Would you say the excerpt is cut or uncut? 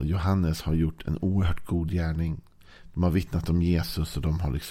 uncut